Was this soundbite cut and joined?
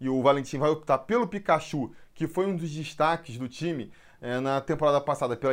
no; 0 cuts

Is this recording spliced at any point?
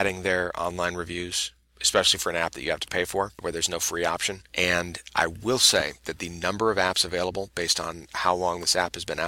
no; 0 cuts

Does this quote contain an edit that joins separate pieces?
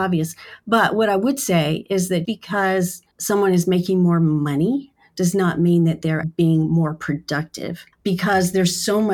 yes; 4 cuts; at 2.2 s, 3.1 s, 6.2 s, 7.9 s

